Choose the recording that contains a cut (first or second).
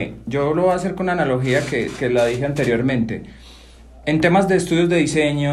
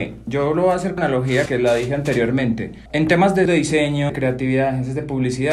second